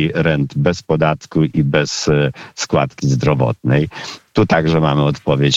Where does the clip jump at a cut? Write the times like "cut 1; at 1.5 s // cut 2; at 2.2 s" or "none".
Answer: none